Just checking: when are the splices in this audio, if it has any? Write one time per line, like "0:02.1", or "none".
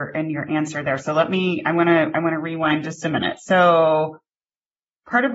none